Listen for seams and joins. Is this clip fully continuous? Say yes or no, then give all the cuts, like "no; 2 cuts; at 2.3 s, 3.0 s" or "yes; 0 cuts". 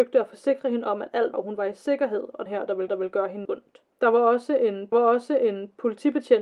no; 6 cuts; at 1.3 s, 2.5 s, 2.9 s, 3.4 s, 3.9 s, 4.9 s